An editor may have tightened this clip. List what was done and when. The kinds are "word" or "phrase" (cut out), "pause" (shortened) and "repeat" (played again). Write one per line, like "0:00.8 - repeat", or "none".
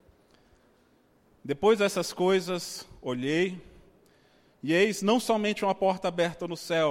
none